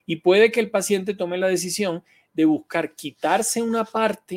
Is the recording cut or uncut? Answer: uncut